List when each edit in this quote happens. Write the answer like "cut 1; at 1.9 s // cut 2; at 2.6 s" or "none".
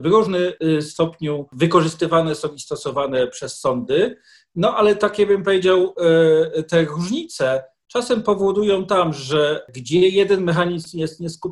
none

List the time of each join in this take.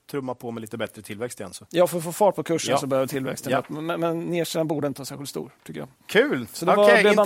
cut 1; at 5.9 s

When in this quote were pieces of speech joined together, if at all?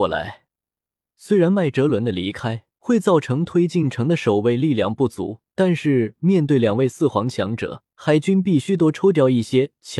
cut 1; at 2.7 s // cut 2; at 5.5 s // cut 3; at 7.9 s

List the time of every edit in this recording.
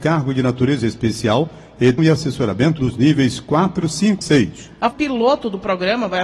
cut 1; at 2.0 s // cut 2; at 2.8 s // cut 3; at 4.2 s // cut 4; at 4.9 s

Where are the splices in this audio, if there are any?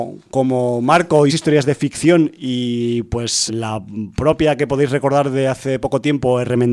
cut 1; at 1.3 s // cut 2; at 3.5 s

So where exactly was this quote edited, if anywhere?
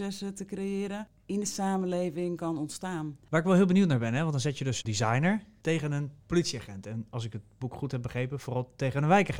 cut 1; at 2.4 s // cut 2; at 4.8 s // cut 3; at 6.2 s

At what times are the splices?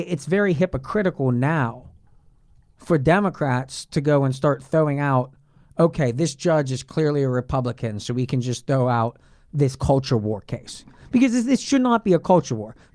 none

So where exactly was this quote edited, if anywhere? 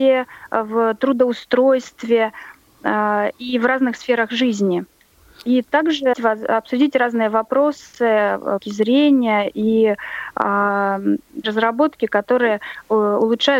cut 1; at 6.1 s // cut 2; at 8.6 s // cut 3; at 11.4 s

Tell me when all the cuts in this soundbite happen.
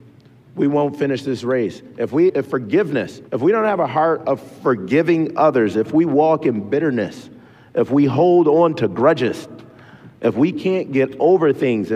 cut 1; at 2.3 s // cut 2; at 3.3 s

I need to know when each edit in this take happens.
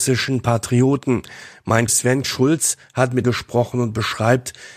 cut 1; at 1.9 s // cut 2; at 2.2 s // cut 3; at 3.2 s

